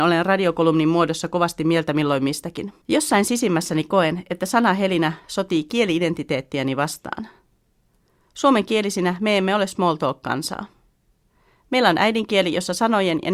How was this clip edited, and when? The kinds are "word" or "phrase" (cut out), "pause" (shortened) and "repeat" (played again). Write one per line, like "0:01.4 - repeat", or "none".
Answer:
0:02.8 - pause